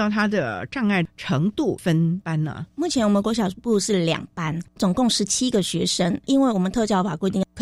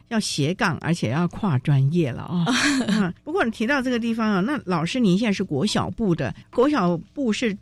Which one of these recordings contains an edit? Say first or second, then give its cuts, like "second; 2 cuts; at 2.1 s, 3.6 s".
second; 1 cut; at 3.2 s